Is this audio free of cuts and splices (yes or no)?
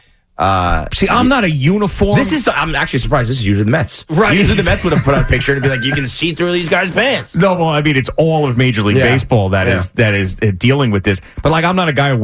yes